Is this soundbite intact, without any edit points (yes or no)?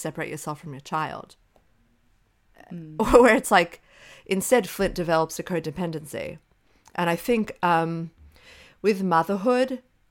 yes